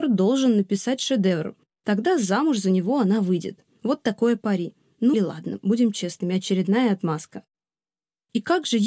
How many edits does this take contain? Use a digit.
1